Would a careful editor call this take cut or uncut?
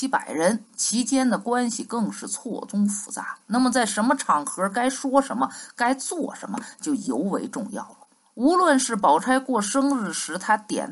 cut